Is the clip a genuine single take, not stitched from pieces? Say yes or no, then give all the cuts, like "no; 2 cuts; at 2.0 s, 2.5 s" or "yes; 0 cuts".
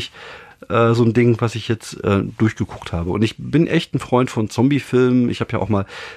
yes; 0 cuts